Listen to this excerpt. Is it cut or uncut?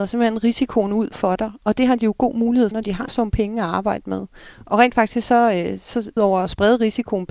cut